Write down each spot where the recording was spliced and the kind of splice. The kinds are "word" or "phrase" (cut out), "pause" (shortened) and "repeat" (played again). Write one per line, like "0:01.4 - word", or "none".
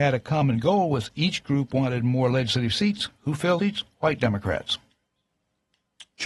0:03.6 - word